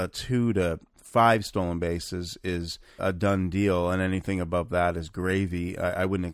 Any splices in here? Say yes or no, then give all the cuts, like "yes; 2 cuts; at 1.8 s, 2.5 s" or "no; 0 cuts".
yes; 1 cut; at 3.0 s